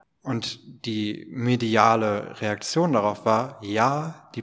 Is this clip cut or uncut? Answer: uncut